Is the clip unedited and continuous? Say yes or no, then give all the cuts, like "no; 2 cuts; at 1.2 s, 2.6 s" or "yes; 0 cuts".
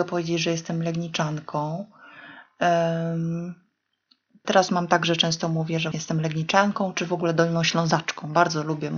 no; 2 cuts; at 4.4 s, 5.9 s